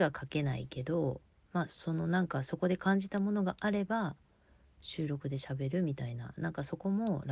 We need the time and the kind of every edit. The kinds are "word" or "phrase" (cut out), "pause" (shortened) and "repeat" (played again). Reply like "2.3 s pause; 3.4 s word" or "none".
none